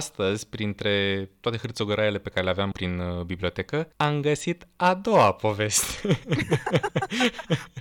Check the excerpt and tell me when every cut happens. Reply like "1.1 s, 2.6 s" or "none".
2.7 s, 3.9 s